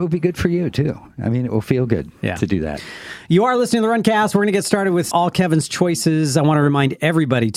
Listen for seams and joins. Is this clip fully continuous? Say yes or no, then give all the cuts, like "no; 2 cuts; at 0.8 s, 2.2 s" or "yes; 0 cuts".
no; 1 cut; at 5.1 s